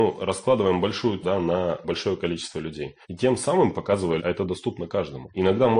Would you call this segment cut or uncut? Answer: cut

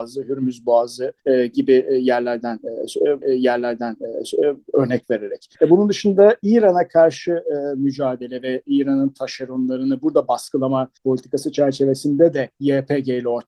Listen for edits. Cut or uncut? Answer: cut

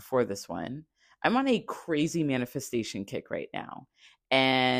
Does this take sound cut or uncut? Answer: uncut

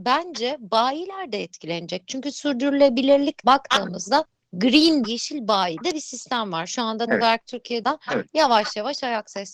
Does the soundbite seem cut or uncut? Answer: cut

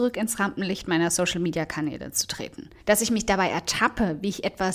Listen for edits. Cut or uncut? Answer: cut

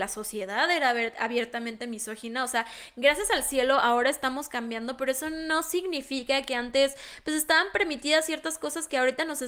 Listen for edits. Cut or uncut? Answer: uncut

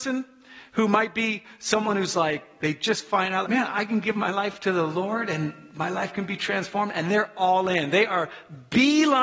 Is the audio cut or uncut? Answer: cut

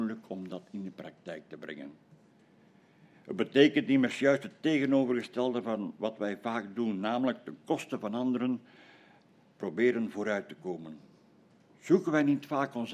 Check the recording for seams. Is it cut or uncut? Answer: uncut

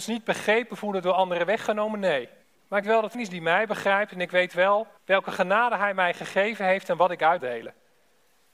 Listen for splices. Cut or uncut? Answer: cut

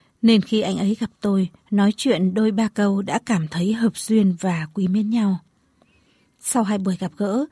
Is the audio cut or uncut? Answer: uncut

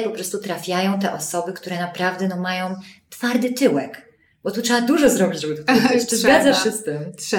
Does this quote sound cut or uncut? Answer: uncut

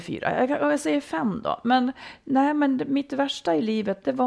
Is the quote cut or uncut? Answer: uncut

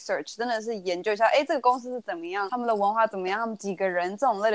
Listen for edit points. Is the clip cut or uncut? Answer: cut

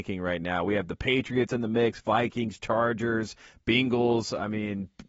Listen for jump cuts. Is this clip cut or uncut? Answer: uncut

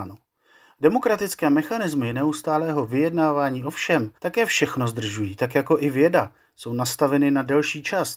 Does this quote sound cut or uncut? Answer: cut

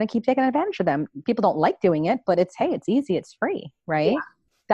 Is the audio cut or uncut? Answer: uncut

